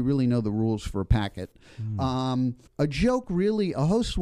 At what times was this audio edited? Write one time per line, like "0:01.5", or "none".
0:02.7